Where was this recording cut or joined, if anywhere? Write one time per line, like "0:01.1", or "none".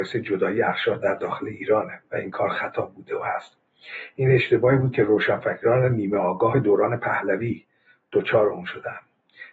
none